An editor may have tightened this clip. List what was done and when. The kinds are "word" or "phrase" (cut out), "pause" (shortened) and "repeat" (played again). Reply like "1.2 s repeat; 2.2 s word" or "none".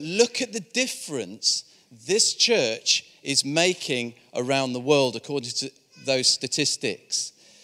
none

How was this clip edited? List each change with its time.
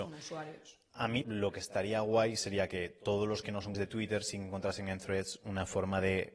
1.2 s word; 3.7 s word

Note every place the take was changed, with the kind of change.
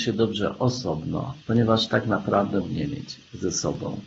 1.4 s pause; 2.6 s word

